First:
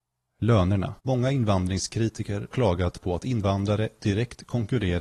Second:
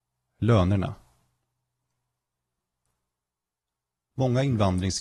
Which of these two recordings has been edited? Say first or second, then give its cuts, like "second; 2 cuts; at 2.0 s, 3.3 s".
first; 2 cuts; at 1.0 s, 2.5 s